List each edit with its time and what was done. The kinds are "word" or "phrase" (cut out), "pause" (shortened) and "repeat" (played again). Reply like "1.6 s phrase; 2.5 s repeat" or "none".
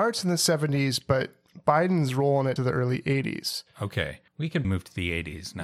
2.6 s phrase; 4.3 s pause; 4.6 s word